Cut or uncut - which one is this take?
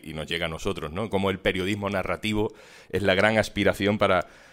uncut